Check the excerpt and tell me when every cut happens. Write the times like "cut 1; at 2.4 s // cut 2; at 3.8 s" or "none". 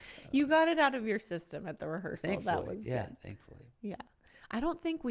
none